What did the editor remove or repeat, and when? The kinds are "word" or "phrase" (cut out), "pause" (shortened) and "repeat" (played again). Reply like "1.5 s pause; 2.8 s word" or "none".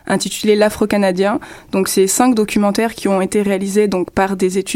none